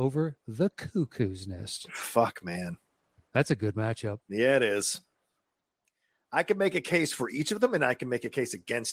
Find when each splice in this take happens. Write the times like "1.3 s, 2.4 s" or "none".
none